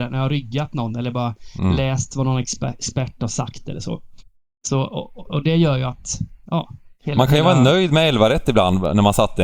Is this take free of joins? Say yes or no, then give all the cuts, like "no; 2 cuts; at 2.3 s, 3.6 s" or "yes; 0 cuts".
yes; 0 cuts